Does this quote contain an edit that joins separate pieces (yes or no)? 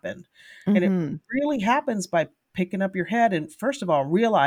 no